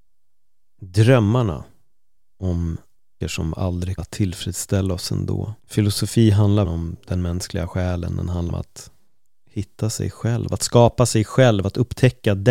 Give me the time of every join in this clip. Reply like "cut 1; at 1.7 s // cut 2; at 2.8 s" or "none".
cut 1; at 3.2 s // cut 2; at 4.0 s // cut 3; at 5.6 s // cut 4; at 6.6 s // cut 5; at 8.5 s